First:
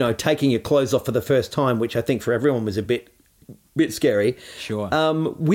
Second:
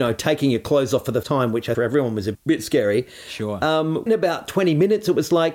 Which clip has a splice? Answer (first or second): second